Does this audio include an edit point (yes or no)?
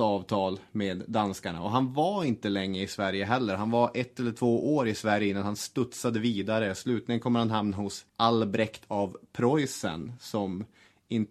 yes